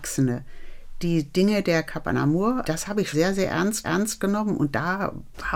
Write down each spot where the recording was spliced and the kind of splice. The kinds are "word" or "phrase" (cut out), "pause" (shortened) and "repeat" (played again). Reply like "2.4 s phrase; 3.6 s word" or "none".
2.6 s word; 3.1 s word; 3.8 s repeat